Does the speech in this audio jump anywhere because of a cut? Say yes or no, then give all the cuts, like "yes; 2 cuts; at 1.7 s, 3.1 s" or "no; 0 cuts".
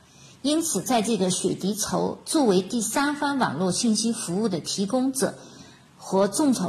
no; 0 cuts